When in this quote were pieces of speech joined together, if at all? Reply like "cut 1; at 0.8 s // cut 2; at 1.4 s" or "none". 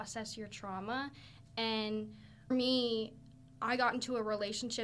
cut 1; at 2.5 s

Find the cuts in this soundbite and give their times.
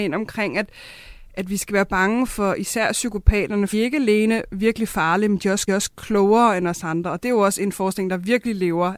cut 1; at 2.3 s // cut 2; at 3.7 s // cut 3; at 5.7 s

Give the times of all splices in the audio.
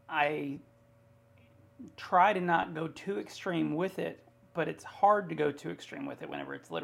none

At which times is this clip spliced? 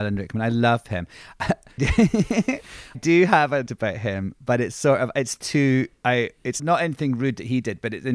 cut 1; at 1.8 s // cut 2; at 2.9 s // cut 3; at 3.7 s // cut 4; at 6.0 s // cut 5; at 6.6 s

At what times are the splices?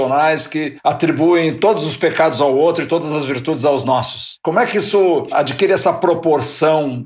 none

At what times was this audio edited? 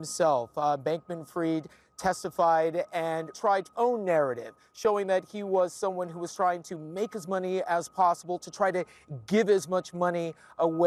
cut 1; at 3.3 s // cut 2; at 3.7 s // cut 3; at 7.2 s

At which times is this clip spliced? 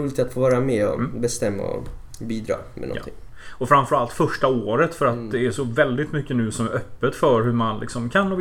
none

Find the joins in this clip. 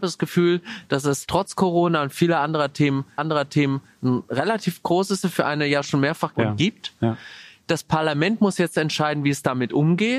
cut 1; at 3.2 s // cut 2; at 5.2 s // cut 3; at 6.3 s

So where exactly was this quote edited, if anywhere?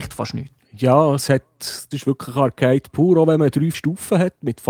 cut 1; at 1.9 s // cut 2; at 3.7 s

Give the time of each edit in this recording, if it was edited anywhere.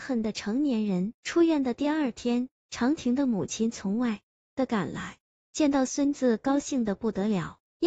cut 1; at 1.2 s

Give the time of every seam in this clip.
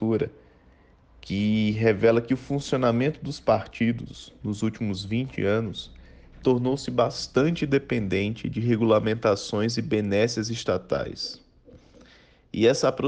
none

